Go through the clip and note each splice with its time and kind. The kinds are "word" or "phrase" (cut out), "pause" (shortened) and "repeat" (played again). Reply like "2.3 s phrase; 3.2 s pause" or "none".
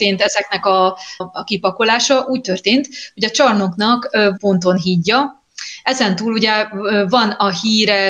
1.2 s phrase; 4.4 s phrase